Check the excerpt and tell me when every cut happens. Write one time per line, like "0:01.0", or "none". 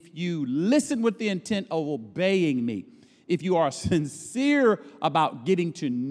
none